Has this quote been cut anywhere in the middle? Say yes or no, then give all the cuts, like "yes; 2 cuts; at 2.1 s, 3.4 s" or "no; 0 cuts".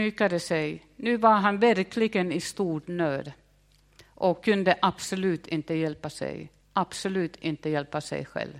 yes; 1 cut; at 6.6 s